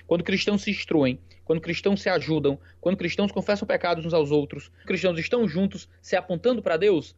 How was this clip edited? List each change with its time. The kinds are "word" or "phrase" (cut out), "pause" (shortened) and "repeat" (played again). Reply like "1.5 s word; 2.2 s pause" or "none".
4.8 s word